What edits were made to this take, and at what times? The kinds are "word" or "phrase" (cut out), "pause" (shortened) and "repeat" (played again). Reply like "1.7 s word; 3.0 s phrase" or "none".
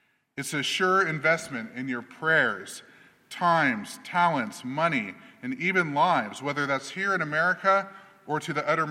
none